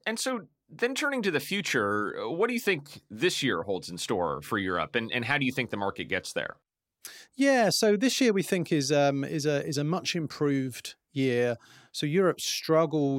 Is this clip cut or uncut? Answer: uncut